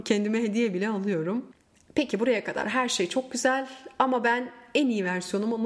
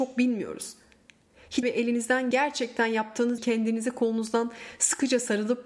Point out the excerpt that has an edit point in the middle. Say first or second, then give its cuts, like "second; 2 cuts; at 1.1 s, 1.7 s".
second; 3 cuts; at 1.6 s, 2.3 s, 3.4 s